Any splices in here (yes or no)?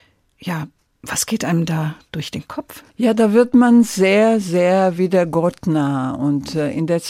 yes